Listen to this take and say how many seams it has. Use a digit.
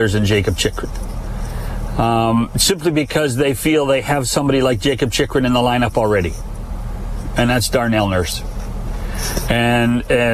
0